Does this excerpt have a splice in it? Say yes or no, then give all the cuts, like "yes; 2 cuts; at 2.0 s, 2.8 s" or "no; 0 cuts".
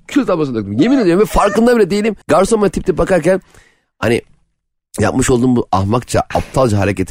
yes; 1 cut; at 2.2 s